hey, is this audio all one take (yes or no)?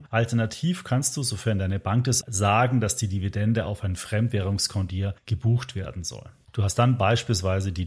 no